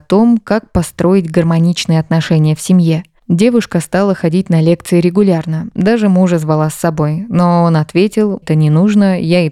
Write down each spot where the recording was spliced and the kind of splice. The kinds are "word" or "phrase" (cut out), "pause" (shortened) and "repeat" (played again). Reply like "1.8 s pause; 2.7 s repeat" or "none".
8.4 s word